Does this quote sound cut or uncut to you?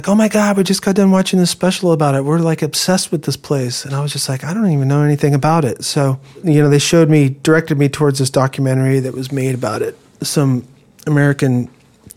uncut